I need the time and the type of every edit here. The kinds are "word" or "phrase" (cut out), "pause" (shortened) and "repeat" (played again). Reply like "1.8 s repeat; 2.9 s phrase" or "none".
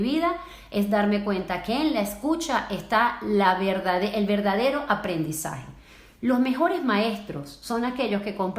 none